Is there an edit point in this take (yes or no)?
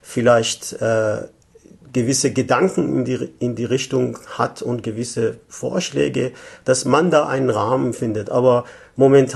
no